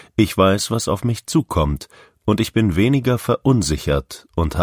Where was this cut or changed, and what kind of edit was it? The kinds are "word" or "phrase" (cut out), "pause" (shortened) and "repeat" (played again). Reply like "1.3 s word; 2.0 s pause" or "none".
none